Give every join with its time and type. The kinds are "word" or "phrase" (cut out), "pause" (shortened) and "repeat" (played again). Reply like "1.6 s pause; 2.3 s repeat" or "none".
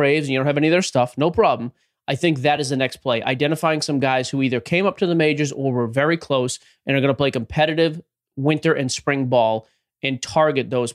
none